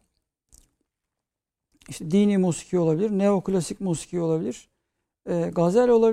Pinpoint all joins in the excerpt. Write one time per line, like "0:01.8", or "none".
none